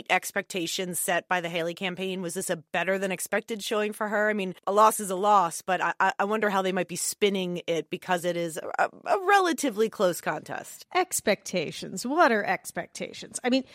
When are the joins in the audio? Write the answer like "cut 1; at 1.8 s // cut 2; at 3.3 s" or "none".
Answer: cut 1; at 4.6 s